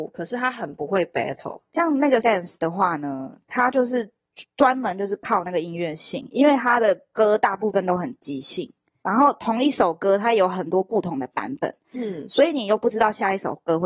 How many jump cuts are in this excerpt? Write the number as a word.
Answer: one